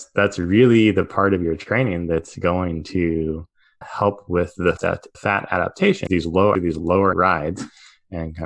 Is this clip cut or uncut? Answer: cut